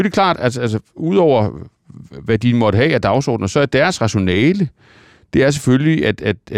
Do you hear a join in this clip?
no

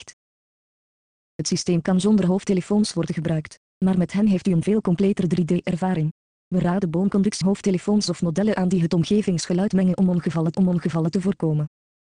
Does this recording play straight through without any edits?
no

